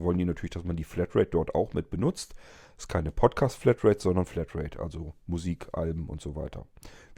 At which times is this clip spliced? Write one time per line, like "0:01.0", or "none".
0:04.3